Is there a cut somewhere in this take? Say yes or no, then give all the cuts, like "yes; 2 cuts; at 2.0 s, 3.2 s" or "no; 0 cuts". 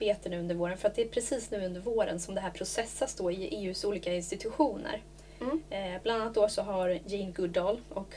no; 0 cuts